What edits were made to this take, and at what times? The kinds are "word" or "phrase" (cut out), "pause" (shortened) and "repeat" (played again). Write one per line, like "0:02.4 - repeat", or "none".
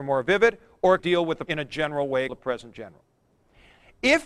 0:01.0 - word
0:01.5 - word
0:02.3 - word